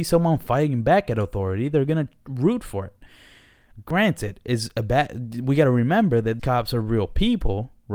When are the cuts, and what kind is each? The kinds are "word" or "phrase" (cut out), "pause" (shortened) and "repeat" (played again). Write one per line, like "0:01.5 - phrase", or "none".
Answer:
0:06.4 - word